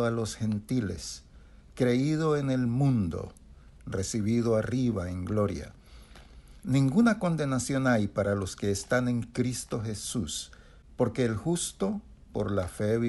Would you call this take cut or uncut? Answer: uncut